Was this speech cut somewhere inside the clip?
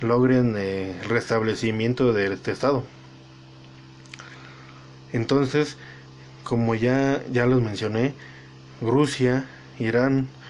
no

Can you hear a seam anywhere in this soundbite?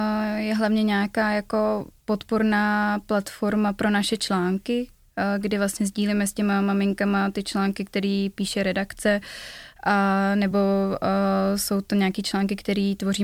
no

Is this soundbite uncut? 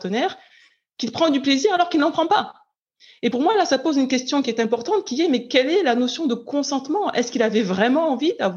yes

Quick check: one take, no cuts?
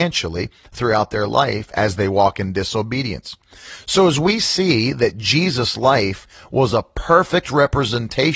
yes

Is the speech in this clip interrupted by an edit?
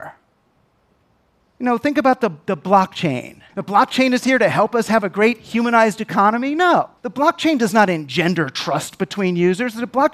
yes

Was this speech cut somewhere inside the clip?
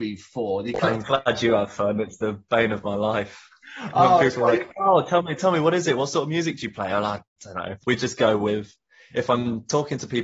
no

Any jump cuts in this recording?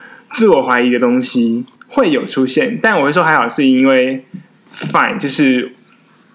yes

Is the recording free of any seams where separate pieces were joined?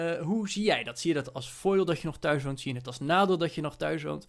yes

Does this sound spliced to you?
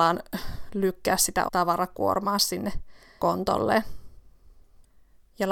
yes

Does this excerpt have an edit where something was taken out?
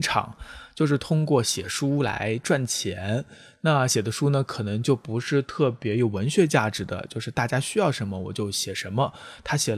no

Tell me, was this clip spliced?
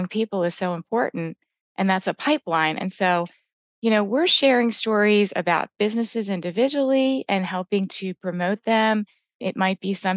no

